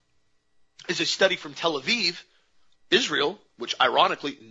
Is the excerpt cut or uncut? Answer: uncut